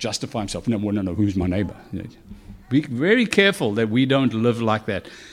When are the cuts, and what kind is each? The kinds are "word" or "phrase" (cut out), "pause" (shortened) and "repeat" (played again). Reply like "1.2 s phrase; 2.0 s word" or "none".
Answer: 2.6 s pause